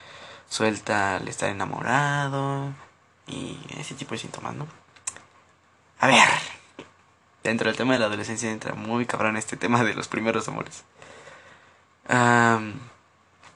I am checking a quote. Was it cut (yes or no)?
no